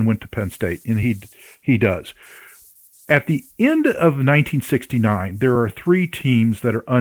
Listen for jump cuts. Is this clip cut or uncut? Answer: uncut